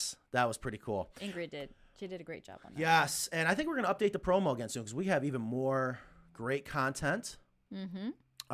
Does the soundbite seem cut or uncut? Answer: uncut